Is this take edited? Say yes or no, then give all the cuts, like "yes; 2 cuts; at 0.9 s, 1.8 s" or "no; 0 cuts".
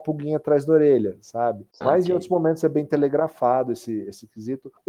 no; 0 cuts